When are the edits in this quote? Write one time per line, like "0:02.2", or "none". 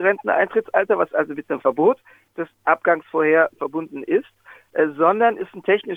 none